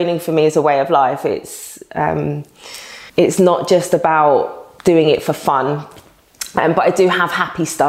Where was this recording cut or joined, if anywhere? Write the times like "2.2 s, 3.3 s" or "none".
3.1 s, 4.8 s

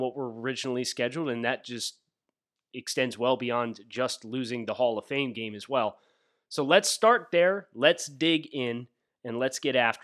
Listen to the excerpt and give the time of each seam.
none

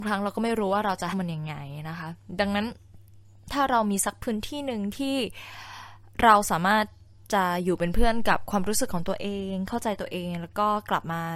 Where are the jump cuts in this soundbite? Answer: 1.1 s

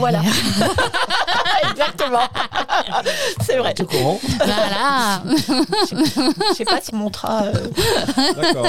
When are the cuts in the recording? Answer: 5.9 s, 6.9 s

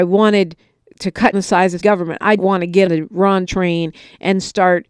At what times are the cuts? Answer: 1.3 s, 1.8 s, 2.4 s, 2.9 s, 3.4 s

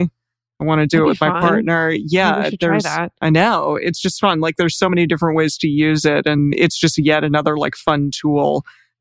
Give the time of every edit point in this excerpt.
3.2 s

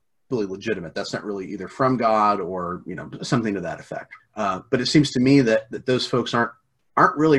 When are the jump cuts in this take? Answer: 4.2 s

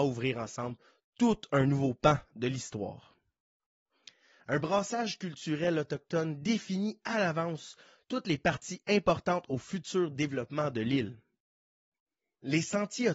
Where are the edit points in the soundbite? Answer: none

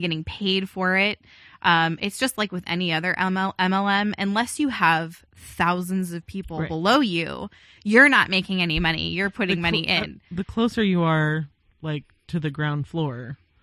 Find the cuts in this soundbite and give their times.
none

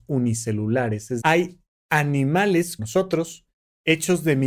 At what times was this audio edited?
1.2 s, 2.8 s

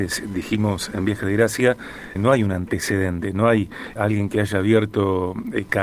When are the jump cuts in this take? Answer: 2.1 s, 4.0 s

